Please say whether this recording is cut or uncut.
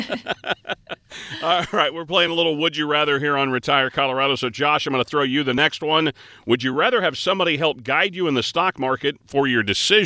uncut